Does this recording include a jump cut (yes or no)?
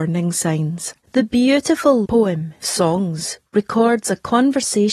yes